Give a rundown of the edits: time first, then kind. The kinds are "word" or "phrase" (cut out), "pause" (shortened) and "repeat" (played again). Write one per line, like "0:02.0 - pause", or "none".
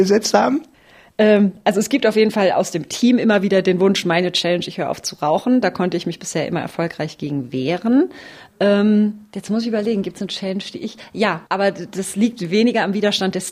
0:11.5 - pause